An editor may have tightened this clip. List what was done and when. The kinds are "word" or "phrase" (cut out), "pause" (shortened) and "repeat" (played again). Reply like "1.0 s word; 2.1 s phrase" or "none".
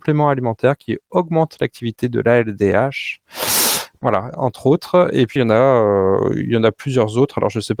5.4 s word